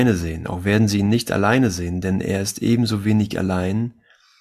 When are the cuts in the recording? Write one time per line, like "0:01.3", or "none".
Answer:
none